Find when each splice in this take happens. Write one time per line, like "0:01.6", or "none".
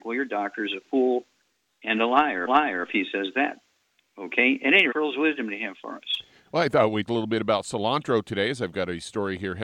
0:02.5
0:04.9
0:07.1